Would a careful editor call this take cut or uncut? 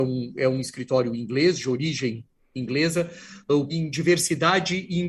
cut